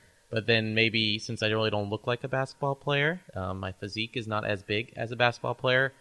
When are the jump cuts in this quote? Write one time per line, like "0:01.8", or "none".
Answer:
0:03.3